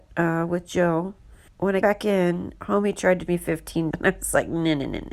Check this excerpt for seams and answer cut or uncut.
cut